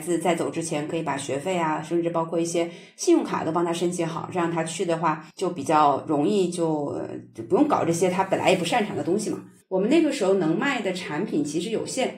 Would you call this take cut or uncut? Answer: cut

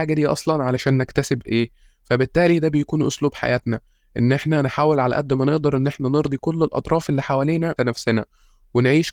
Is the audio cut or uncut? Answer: cut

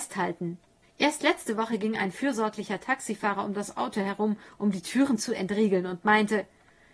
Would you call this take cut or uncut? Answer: uncut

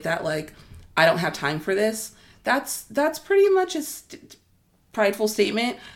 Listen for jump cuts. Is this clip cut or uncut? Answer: uncut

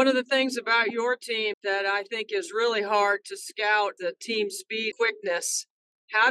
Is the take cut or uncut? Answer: cut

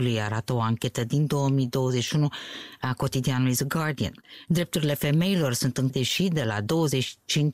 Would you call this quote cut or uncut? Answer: cut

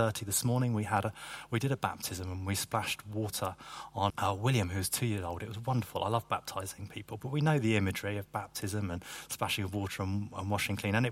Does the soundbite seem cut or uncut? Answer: cut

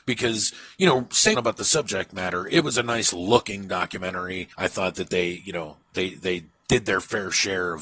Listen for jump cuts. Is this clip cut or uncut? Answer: cut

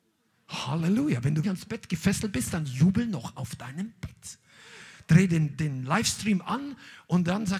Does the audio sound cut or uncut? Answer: cut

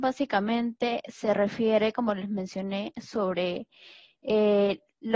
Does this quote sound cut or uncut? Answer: uncut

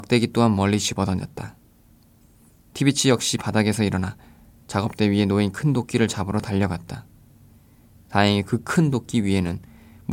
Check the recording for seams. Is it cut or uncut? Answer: uncut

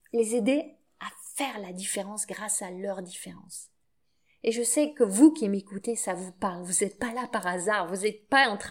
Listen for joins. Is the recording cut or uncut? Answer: uncut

